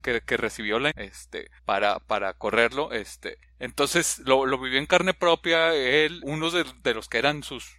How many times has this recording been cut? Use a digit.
4